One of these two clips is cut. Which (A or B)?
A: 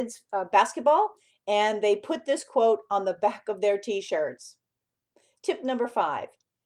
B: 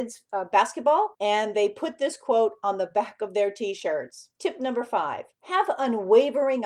B